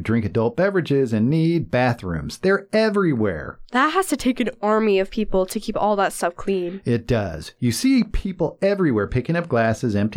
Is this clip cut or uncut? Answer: uncut